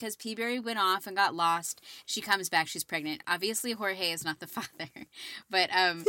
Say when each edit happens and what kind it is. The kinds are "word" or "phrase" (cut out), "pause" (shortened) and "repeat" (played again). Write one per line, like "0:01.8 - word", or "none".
none